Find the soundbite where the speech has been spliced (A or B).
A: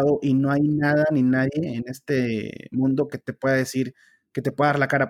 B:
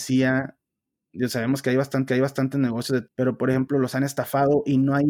B